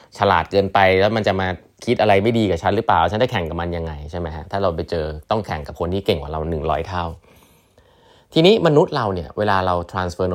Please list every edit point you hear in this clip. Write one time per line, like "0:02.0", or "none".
none